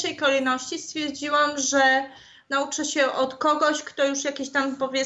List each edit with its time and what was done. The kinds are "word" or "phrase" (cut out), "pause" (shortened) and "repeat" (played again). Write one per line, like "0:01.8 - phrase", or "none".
none